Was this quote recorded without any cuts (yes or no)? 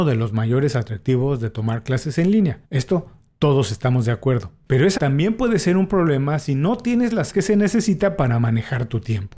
no